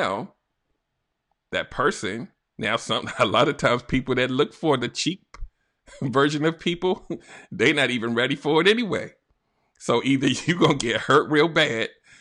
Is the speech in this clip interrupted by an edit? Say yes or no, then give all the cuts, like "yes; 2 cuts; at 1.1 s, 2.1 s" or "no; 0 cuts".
no; 0 cuts